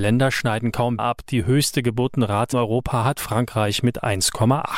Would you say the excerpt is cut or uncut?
cut